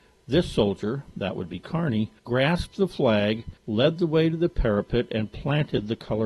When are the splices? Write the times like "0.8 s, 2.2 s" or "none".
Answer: 2.2 s, 3.6 s